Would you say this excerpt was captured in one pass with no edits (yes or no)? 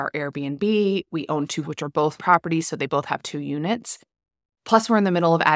no